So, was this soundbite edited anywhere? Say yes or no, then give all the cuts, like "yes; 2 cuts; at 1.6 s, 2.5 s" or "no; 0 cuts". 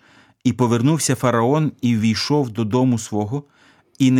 no; 0 cuts